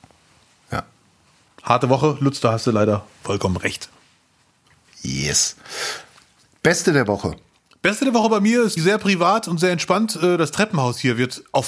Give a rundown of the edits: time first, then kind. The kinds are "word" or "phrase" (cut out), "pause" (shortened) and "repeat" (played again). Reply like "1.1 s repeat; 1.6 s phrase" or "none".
8.8 s word